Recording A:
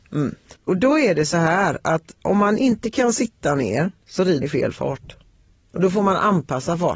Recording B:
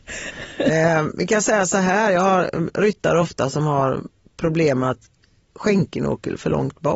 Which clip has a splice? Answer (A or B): A